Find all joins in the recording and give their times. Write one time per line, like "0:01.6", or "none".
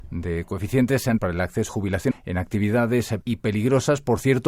0:01.2
0:01.7
0:02.1
0:03.2